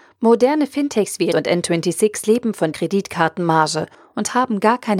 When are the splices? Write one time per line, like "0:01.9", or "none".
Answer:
0:01.3
0:02.7